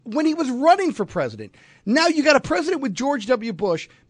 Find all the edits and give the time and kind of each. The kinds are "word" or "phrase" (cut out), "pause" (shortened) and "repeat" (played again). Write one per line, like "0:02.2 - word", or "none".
none